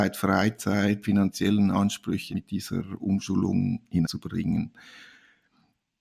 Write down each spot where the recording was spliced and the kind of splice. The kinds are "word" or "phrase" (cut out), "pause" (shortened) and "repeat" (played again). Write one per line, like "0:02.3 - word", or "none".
0:01.0 - word
0:02.3 - word
0:04.0 - word